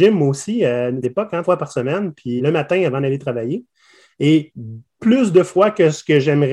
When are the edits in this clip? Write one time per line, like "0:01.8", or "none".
0:01.0
0:01.4
0:02.4
0:05.0